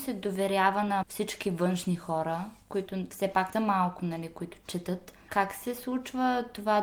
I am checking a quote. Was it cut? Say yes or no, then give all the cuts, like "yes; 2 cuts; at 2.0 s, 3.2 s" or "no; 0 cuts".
yes; 2 cuts; at 1.0 s, 3.5 s